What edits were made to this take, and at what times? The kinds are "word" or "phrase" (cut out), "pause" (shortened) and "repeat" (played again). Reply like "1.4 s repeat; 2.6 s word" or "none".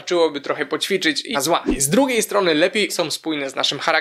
1.3 s phrase; 2.9 s phrase